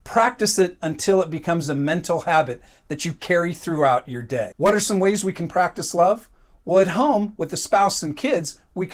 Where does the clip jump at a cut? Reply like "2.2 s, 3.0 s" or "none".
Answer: none